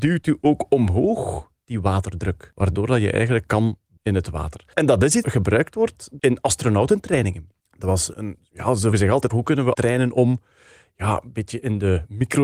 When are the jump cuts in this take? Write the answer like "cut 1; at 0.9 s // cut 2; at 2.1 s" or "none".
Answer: cut 1; at 4.0 s // cut 2; at 5.2 s // cut 3; at 8.1 s // cut 4; at 8.9 s // cut 5; at 9.3 s // cut 6; at 9.7 s